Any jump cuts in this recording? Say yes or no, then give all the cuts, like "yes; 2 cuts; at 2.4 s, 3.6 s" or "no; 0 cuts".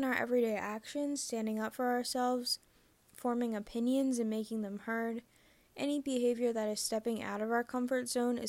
no; 0 cuts